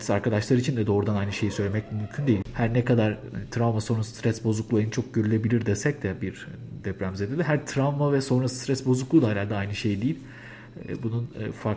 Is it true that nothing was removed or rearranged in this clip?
yes; 0 cuts

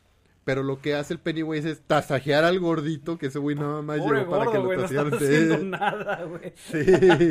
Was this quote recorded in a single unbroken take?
yes; 0 cuts

